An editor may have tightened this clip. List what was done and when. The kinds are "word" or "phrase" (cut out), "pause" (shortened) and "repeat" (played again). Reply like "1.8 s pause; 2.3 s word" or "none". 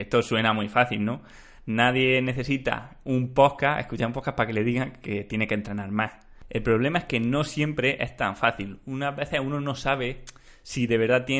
none